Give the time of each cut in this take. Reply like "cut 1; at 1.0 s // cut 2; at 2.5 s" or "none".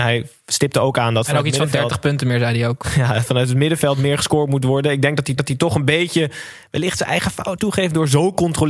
cut 1; at 5.4 s // cut 2; at 7.6 s